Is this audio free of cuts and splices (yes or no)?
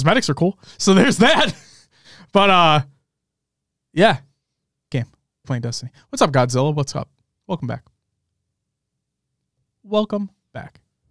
no